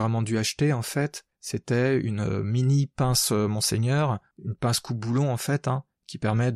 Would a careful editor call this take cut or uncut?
uncut